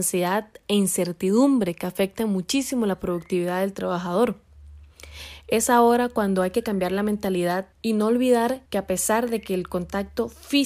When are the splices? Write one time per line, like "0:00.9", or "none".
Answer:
0:07.7
0:08.7